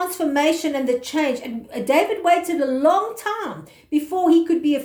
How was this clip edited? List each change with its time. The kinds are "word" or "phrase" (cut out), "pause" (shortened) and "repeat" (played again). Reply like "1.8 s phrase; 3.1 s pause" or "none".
none